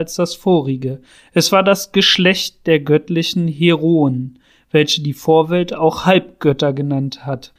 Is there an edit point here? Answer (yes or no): no